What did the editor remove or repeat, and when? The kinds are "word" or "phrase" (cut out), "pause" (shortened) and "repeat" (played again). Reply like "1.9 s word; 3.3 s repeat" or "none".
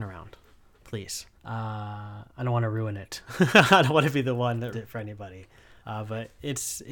1.4 s pause; 4.7 s word; 5.8 s pause